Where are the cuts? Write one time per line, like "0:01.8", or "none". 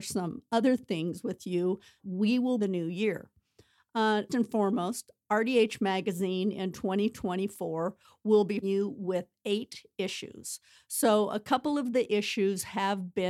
0:02.0
0:02.6
0:04.3
0:08.6